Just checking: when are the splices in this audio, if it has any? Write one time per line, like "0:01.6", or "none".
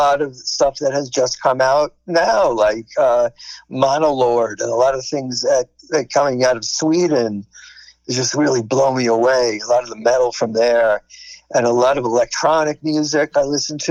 none